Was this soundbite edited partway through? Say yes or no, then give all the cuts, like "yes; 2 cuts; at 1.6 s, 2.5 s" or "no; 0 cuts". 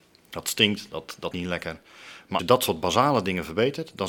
yes; 2 cuts; at 1.3 s, 2.4 s